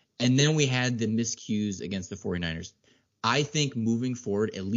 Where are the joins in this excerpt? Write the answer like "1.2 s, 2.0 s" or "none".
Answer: none